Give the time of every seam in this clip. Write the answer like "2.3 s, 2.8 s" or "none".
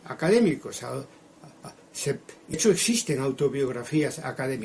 2.5 s